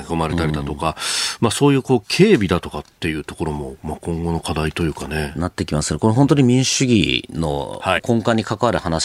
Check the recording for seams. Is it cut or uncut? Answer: cut